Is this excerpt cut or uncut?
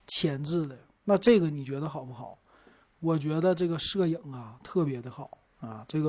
uncut